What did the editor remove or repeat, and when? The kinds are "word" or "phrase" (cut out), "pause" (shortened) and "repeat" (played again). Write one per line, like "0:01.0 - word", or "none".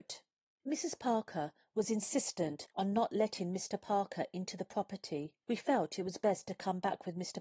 none